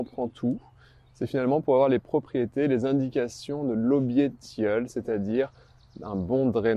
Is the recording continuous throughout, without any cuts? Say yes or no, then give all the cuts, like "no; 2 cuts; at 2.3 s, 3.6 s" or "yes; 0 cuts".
yes; 0 cuts